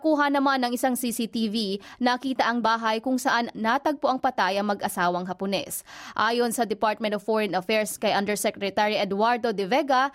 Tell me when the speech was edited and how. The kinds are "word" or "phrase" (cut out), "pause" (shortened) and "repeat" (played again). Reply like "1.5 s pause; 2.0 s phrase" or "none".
2.6 s phrase